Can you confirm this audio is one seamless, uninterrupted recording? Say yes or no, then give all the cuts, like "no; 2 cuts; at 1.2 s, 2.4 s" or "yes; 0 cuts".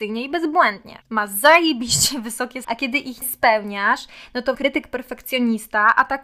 no; 4 cuts; at 1.0 s, 2.6 s, 3.2 s, 4.5 s